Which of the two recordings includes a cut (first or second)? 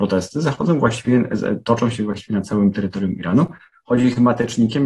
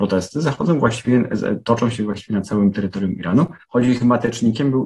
second